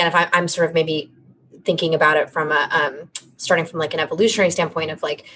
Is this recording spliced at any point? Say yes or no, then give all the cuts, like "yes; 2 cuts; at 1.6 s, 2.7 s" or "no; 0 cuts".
no; 0 cuts